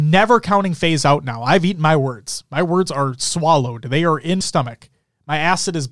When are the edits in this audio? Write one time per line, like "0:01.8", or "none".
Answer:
0:04.4

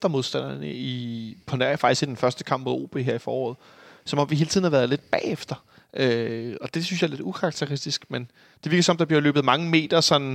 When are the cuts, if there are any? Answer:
none

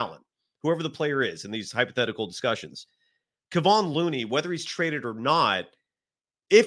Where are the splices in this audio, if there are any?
none

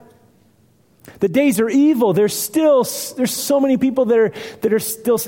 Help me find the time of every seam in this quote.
0:03.4

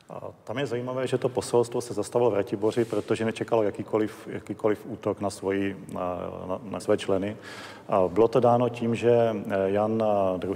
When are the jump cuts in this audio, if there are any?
0:06.8

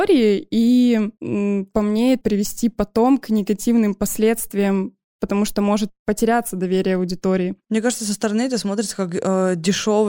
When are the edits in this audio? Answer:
0:01.7
0:02.2

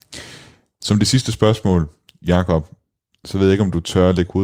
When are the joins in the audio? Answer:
none

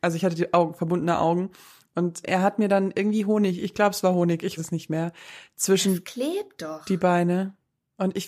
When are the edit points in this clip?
0:02.2
0:04.6

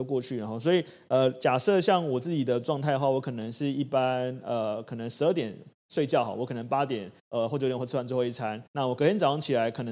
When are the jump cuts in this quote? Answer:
0:07.2
0:08.7

